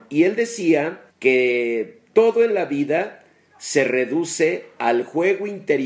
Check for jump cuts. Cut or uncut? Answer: cut